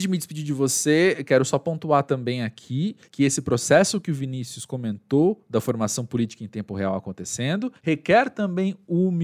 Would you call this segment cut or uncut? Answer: cut